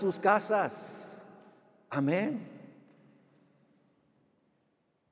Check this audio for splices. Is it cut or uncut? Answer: uncut